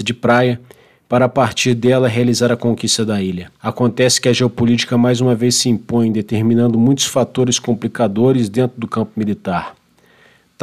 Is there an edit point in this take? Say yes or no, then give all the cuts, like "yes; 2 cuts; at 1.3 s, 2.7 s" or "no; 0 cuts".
yes; 1 cut; at 3.6 s